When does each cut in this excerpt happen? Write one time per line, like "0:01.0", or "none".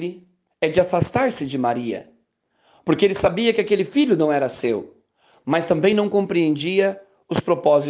none